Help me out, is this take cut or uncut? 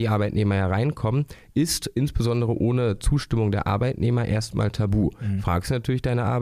uncut